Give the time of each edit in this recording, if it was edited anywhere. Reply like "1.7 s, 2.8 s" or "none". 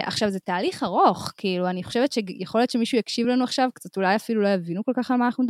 none

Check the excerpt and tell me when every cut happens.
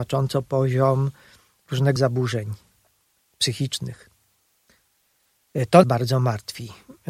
2.0 s, 5.8 s

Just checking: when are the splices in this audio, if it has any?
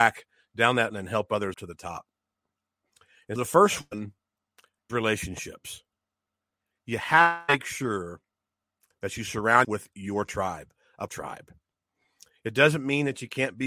0.9 s, 1.5 s, 3.4 s, 4.9 s, 9.6 s, 11.1 s

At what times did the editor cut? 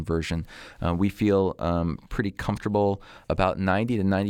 3.2 s

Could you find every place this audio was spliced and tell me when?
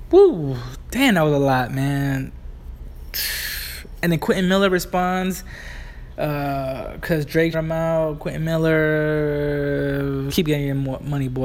7.5 s, 10.3 s

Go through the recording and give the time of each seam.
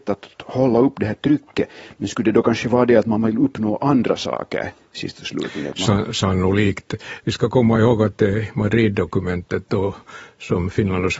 none

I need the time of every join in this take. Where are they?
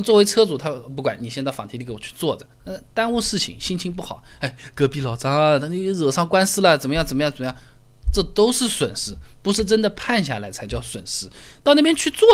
2.5 s

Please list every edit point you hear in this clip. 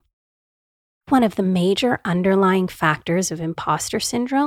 1.1 s

